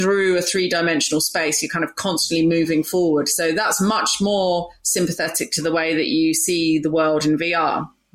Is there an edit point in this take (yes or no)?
no